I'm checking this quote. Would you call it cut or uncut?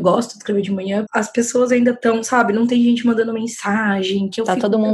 cut